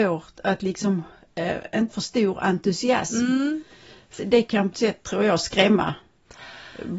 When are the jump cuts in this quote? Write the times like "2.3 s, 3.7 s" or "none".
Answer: 1.9 s, 4.2 s, 4.7 s

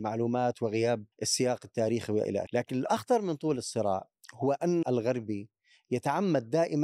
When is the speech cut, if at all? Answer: 1.1 s, 2.5 s, 4.8 s

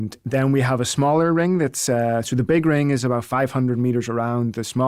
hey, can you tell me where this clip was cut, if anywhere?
none

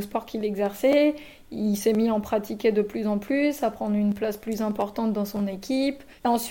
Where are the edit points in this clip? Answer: none

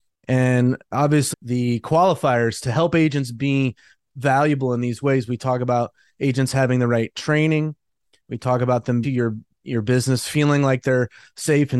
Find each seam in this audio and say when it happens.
1.3 s, 9.0 s

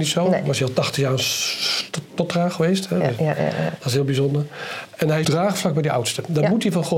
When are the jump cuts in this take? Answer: 5.2 s

